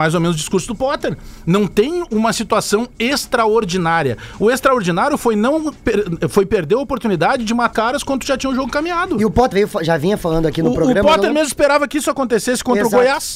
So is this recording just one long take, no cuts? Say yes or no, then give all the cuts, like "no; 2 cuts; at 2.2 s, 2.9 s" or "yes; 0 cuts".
no; 2 cuts; at 7.7 s, 9.5 s